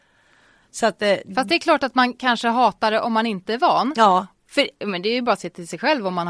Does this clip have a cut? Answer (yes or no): no